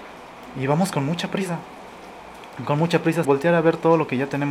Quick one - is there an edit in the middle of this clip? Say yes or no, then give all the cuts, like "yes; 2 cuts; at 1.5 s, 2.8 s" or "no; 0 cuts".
yes; 1 cut; at 3.2 s